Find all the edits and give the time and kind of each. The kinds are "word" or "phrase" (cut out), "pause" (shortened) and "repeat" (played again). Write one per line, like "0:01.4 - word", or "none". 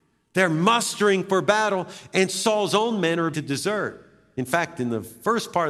0:03.3 - word